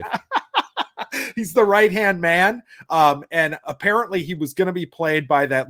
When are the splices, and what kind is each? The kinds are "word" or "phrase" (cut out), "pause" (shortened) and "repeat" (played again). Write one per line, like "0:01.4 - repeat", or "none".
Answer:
0:03.6 - word

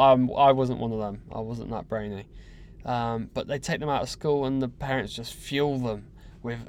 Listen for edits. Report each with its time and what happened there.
none

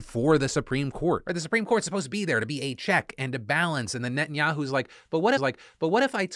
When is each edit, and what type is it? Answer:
0:05.4 - repeat

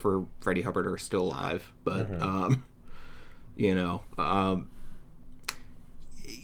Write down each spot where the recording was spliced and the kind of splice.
none

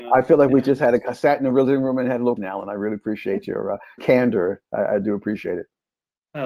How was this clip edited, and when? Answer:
0:02.4 - word
0:04.0 - word

